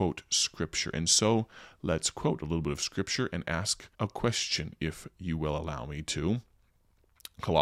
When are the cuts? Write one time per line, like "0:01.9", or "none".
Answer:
0:03.9

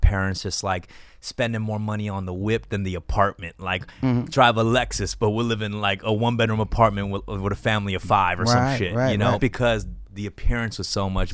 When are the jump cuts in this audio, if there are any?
0:09.4

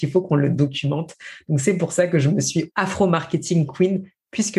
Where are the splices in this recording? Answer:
0:02.7

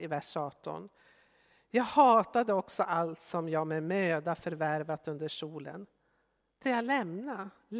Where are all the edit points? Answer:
0:06.6

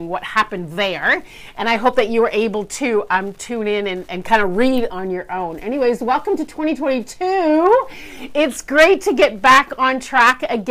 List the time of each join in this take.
0:04.9

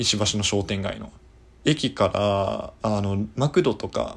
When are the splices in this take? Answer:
0:01.3
0:02.8

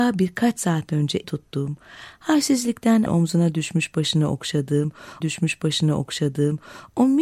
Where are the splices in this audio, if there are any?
0:01.2
0:03.1
0:05.2

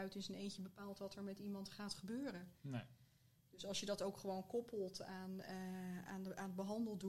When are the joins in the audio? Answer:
none

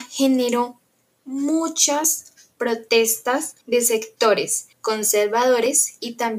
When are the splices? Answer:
0:03.6
0:04.7

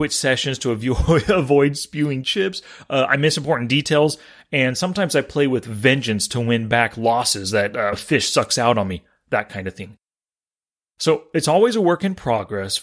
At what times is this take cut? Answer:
0:07.9

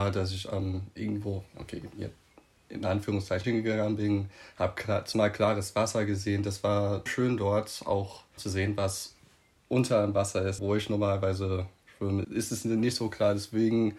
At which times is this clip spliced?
0:03.4
0:05.1
0:07.1
0:08.4
0:10.6
0:12.2

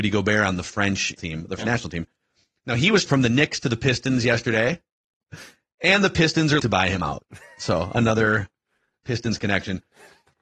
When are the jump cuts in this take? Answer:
0:01.2
0:01.6
0:03.1
0:06.6

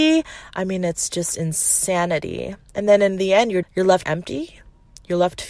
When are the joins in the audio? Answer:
0:03.6
0:04.0

